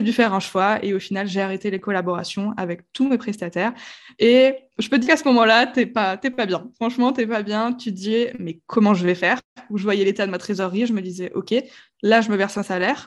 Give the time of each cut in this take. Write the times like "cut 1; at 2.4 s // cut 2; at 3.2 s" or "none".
cut 1; at 5.0 s

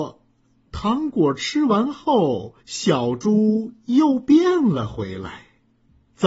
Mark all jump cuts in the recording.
cut 1; at 2.6 s

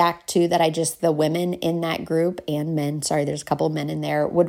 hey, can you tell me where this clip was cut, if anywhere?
cut 1; at 1.0 s

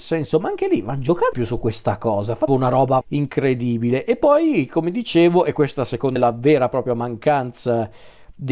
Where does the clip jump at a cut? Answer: cut 1; at 1.3 s // cut 2; at 2.5 s // cut 3; at 3.0 s // cut 4; at 6.2 s

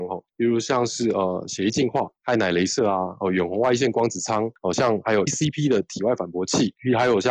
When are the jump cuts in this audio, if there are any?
cut 1; at 5.3 s

